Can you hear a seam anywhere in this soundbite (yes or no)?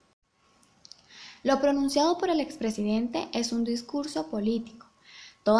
no